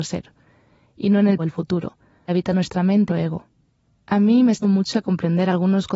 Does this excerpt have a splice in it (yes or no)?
yes